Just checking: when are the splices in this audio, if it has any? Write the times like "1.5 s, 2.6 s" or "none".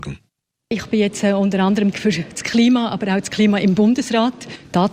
1.9 s